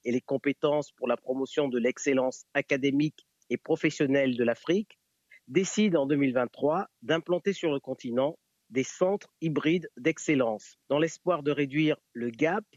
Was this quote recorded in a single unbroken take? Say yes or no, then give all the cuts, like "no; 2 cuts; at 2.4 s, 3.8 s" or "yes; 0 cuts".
yes; 0 cuts